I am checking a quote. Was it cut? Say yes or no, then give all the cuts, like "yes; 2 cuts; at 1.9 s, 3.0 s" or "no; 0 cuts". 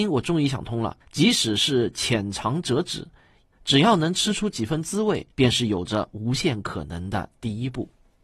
yes; 2 cuts; at 1.0 s, 5.3 s